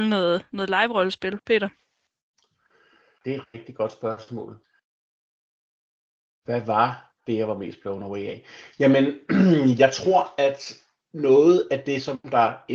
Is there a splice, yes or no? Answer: no